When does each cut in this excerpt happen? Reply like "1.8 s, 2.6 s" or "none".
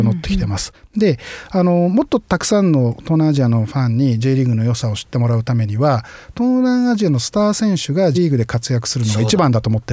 8.1 s